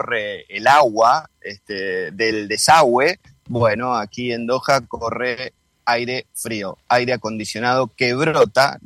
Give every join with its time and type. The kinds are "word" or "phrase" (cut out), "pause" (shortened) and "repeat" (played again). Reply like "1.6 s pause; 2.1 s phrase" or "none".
none